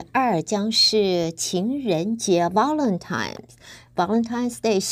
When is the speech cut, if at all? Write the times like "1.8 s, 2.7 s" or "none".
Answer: none